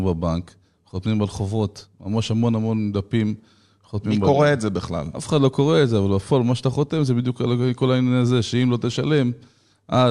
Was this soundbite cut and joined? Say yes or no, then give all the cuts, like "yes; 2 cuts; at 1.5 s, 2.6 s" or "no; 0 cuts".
no; 0 cuts